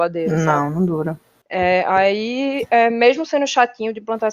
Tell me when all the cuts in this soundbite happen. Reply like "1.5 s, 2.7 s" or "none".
none

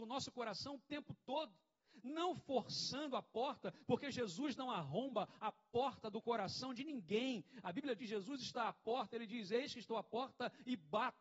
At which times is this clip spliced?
8.0 s

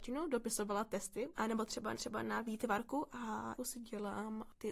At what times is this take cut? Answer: 1.9 s, 3.6 s

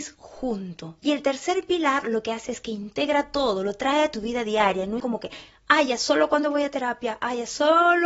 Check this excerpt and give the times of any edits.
1.0 s, 5.0 s

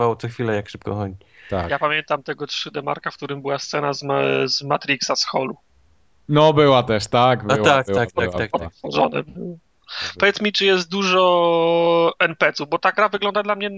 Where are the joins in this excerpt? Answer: none

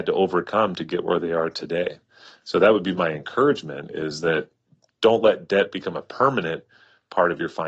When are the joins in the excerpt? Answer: none

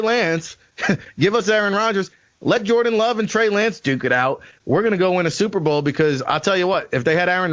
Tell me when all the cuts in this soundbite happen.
none

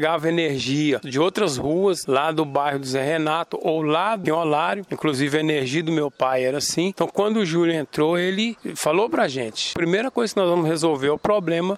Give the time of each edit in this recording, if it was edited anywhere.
4.2 s

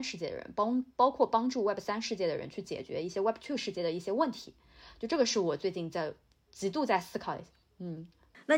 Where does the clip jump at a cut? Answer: none

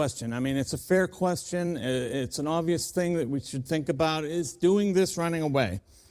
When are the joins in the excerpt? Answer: none

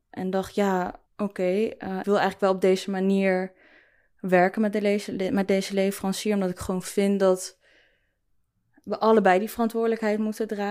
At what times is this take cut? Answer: 1.1 s, 2.0 s

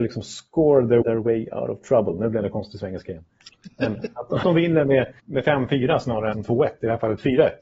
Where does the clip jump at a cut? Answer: 1.0 s, 4.4 s, 5.2 s, 6.3 s

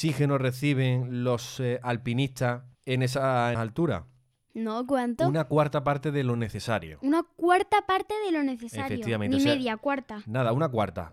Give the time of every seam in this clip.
2.7 s, 3.5 s

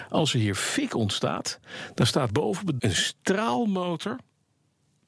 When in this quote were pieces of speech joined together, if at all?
2.3 s, 2.8 s

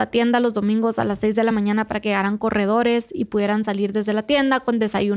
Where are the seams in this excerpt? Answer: none

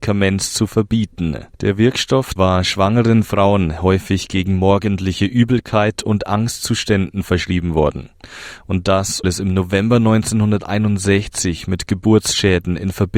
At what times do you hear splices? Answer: 1.5 s, 2.4 s, 9.2 s

